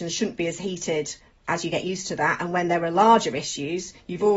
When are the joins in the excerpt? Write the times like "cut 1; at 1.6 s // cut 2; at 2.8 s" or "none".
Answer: none